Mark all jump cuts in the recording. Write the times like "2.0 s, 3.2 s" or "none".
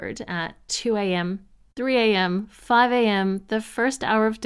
none